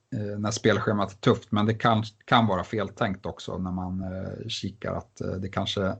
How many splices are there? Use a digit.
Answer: 0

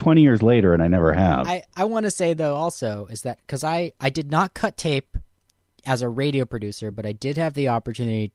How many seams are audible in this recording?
0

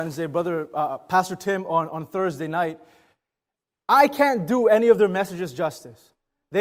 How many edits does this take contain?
0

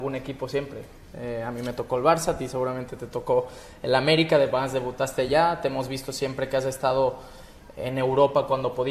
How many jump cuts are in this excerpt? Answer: 0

